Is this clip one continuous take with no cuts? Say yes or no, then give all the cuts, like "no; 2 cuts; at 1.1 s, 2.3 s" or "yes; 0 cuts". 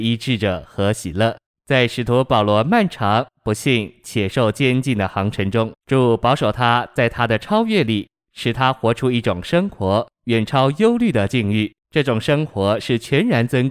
no; 4 cuts; at 1.5 s, 5.8 s, 10.1 s, 11.8 s